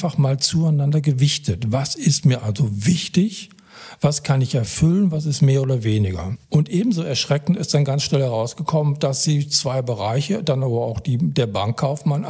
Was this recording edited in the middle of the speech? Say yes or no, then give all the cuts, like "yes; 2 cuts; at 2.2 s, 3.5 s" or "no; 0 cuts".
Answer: yes; 1 cut; at 6.4 s